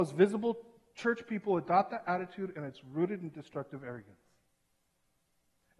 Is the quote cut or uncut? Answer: uncut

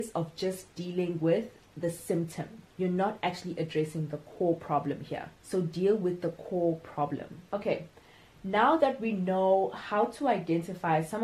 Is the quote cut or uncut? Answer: cut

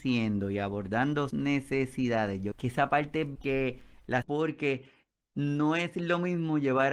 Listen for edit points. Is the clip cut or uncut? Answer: cut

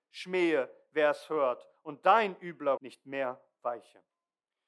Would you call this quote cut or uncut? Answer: cut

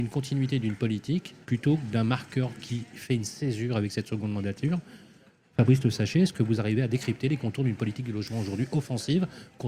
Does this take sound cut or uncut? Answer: cut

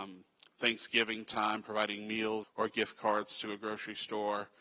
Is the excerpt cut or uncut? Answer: cut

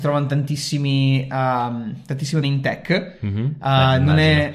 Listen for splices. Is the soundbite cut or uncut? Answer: cut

